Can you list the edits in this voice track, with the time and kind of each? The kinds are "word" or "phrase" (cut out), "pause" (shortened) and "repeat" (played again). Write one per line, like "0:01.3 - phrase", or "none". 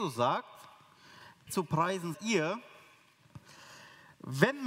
0:01.5 - word
0:02.1 - word